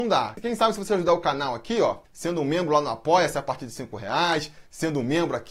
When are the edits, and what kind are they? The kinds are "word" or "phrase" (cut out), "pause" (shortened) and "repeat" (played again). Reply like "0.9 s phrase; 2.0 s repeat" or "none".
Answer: 2.0 s pause